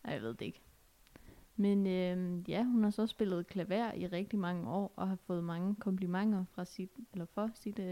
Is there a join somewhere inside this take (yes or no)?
no